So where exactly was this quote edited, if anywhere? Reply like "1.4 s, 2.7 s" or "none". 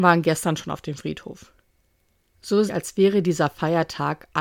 2.7 s